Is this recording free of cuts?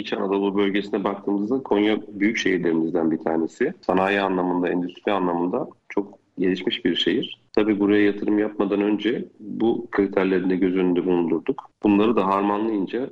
yes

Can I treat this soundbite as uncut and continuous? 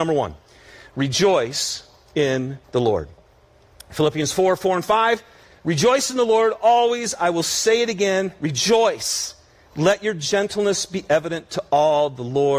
no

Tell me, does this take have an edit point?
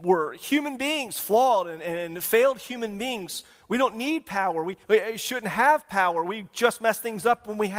yes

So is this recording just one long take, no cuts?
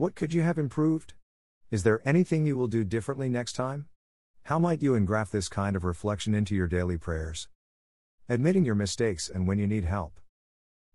yes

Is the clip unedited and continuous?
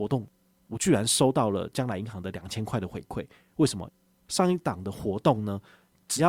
yes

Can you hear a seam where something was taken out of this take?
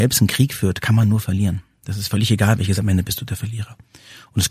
yes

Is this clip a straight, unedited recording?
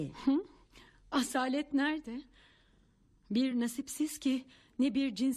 yes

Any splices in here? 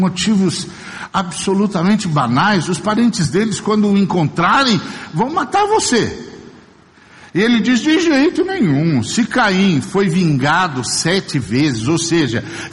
no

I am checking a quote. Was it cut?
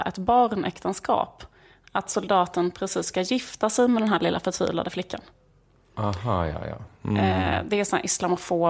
no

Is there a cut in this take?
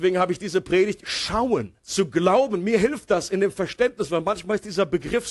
yes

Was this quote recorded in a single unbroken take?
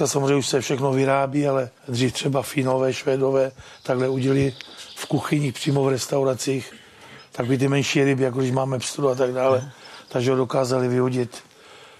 no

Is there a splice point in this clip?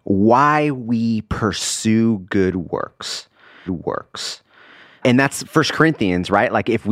yes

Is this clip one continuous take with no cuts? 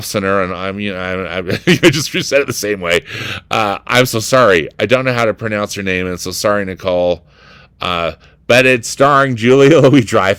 yes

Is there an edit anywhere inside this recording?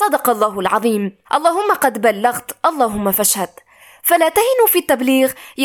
yes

